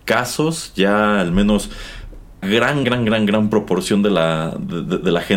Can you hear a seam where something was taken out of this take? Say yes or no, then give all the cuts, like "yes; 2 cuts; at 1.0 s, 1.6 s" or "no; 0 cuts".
yes; 2 cuts; at 2.4 s, 2.8 s